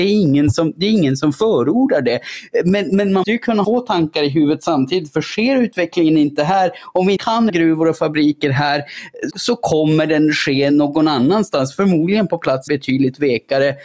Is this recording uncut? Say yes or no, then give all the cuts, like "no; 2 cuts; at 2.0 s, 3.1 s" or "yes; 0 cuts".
no; 6 cuts; at 3.2 s, 3.6 s, 7.2 s, 7.5 s, 9.3 s, 12.7 s